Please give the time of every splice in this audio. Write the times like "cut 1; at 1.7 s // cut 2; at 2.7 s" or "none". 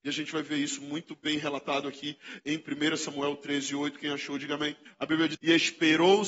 cut 1; at 4.9 s // cut 2; at 5.3 s

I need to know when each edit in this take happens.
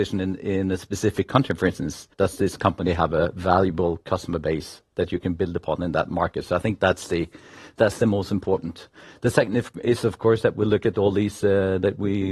cut 1; at 2.1 s

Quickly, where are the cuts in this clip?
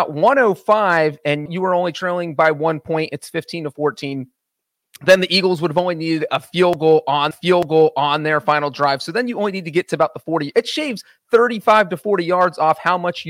cut 1; at 1.5 s // cut 2; at 7.3 s

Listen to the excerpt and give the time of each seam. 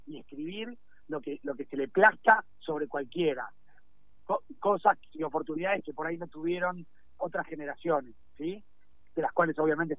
none

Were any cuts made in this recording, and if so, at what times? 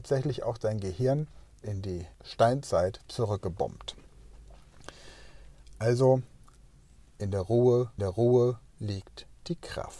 cut 1; at 1.6 s // cut 2; at 2.1 s // cut 3; at 8.0 s

